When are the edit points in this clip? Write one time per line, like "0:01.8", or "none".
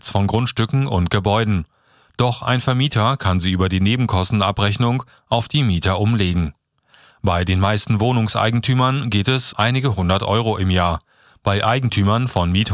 0:09.5